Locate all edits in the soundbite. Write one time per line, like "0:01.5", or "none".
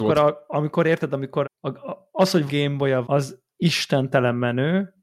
0:01.4
0:02.5
0:03.0

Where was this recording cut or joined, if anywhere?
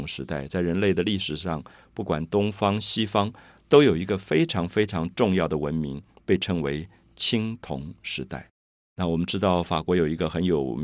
none

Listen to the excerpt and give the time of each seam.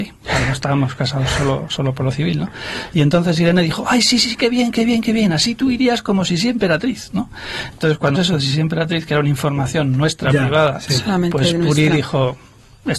0:08.1

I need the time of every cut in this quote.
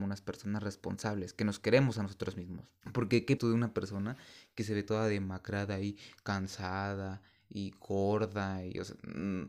0:02.8
0:03.4

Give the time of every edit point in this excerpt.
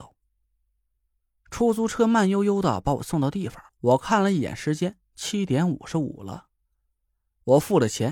0:03.7

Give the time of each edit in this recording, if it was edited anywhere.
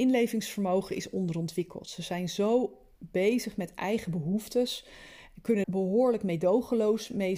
0:05.6

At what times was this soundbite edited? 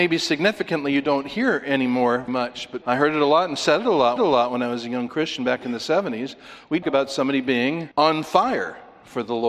0:02.3
0:02.8
0:04.2
0:06.8
0:07.9

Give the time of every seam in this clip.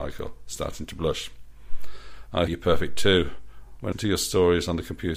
0:02.5
0:03.9

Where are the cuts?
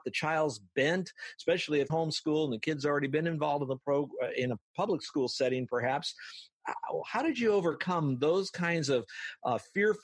0:01.9

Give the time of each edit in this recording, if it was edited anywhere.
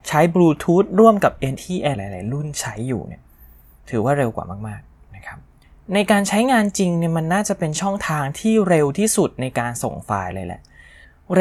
0:01.6
0:01.9

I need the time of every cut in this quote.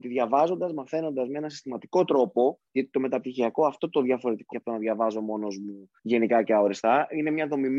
0:02.7
0:04.5
0:06.0

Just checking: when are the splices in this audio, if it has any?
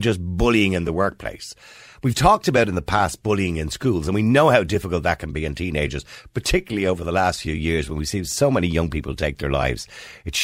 none

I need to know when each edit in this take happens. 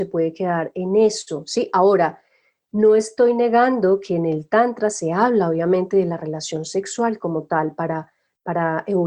none

